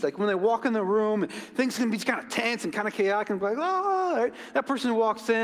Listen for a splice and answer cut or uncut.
uncut